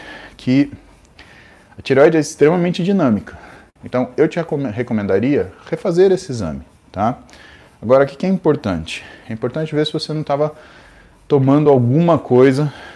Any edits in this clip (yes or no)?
no